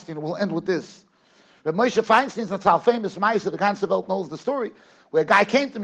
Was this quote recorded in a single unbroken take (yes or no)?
yes